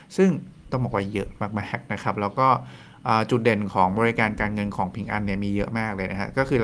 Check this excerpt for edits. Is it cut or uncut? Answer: uncut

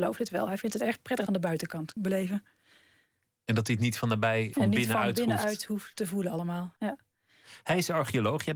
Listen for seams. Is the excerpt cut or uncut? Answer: cut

